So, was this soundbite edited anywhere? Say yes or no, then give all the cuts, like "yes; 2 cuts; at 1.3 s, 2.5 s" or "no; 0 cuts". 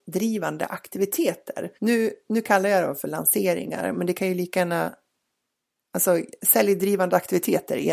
yes; 1 cut; at 1.7 s